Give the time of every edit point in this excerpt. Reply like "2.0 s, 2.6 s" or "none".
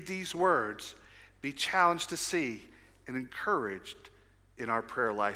none